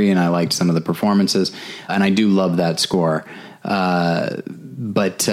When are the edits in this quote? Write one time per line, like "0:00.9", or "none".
0:01.9